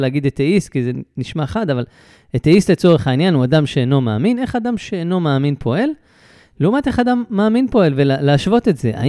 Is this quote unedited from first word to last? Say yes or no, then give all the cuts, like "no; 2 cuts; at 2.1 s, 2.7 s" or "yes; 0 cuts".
yes; 0 cuts